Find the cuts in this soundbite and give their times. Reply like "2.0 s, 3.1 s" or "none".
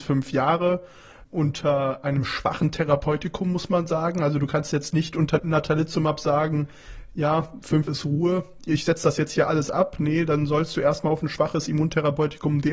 7.9 s